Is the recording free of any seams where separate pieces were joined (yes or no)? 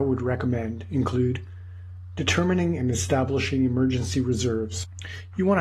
yes